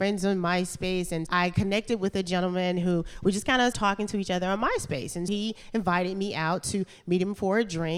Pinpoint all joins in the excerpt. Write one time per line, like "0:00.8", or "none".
0:01.3
0:03.7
0:05.3